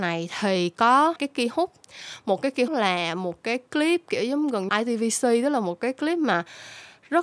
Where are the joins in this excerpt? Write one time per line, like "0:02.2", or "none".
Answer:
0:01.2
0:02.7
0:04.7